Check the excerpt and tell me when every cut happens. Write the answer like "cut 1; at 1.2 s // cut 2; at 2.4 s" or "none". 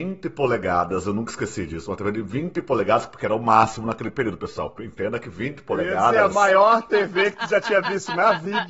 none

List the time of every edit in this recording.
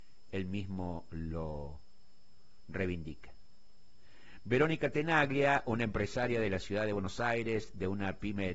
none

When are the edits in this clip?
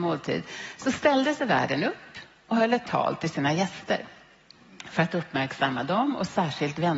none

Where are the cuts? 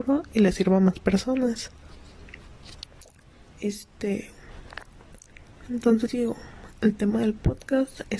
cut 1; at 6.1 s

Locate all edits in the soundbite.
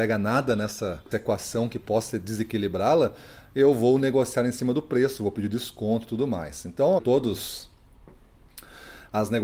cut 1; at 1.1 s // cut 2; at 7.0 s

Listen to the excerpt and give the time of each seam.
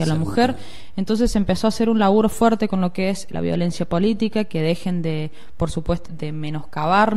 cut 1; at 3.3 s // cut 2; at 6.1 s

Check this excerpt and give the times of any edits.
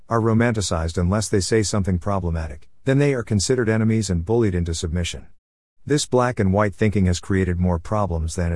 none

